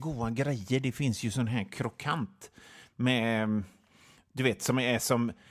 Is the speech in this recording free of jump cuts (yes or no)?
yes